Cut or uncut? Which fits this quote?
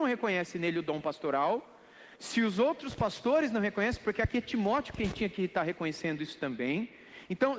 uncut